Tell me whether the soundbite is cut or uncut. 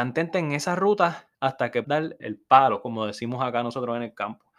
cut